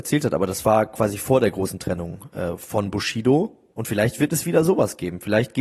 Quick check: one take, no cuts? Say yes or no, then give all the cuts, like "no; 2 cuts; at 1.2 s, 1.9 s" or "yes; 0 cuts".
yes; 0 cuts